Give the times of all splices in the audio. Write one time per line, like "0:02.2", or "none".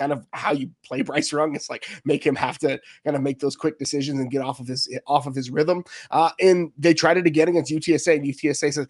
none